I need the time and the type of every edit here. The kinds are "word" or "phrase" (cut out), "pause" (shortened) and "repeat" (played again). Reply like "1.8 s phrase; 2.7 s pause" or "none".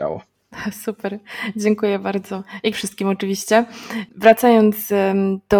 2.7 s word

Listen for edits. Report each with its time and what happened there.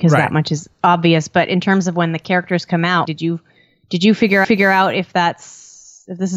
3.1 s word; 4.4 s repeat

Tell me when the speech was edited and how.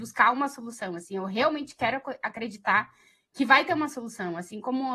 none

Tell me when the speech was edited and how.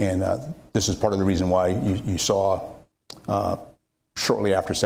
none

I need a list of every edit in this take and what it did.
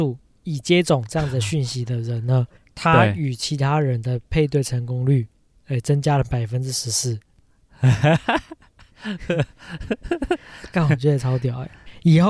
2.6 s pause

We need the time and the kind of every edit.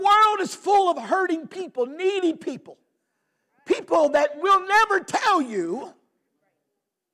none

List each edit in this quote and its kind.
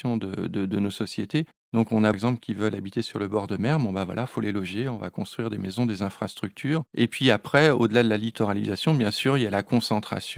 2.1 s phrase; 6.9 s pause

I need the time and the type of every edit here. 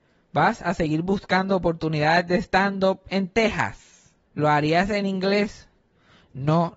4.2 s pause

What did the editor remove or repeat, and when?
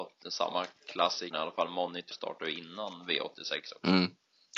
1.3 s word; 2.1 s word

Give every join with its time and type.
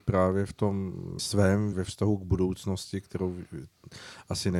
1.2 s word; 1.7 s phrase

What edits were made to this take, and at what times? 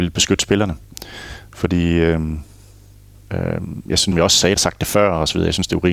4.1 s word; 4.6 s phrase

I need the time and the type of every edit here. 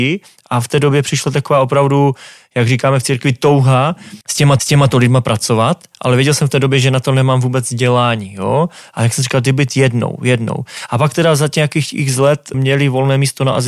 4.2 s pause; 4.6 s repeat; 12.5 s word

